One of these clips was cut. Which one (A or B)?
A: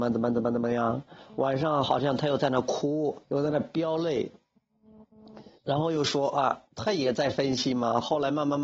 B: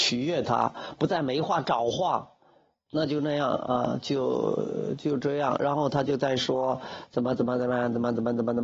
A